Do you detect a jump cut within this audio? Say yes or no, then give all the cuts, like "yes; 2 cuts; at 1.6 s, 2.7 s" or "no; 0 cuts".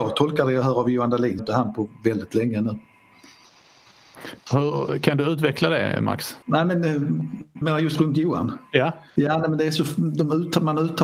yes; 5 cuts; at 1.4 s, 4.4 s, 6.4 s, 7.6 s, 9.1 s